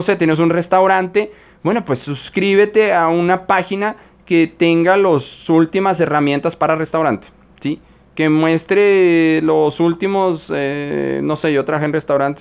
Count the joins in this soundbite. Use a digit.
0